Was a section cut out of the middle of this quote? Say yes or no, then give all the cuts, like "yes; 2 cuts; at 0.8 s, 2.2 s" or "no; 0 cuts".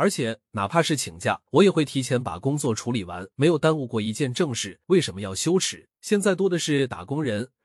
yes; 4 cuts; at 1.5 s, 3.3 s, 4.8 s, 5.9 s